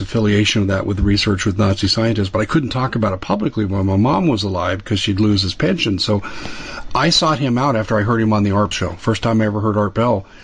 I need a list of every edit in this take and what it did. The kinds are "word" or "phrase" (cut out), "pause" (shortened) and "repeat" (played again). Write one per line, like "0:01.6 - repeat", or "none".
0:08.7 - word